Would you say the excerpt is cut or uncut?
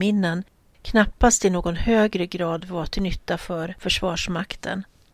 uncut